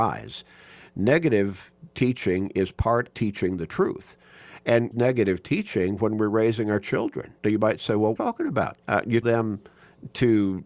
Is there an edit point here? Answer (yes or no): yes